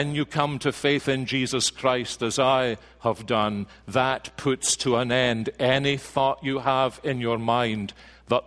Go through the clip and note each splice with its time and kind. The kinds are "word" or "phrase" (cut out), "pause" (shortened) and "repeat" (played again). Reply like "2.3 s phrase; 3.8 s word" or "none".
none